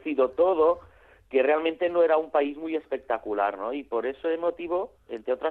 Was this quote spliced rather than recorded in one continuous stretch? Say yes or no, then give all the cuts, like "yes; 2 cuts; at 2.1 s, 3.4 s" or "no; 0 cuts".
no; 0 cuts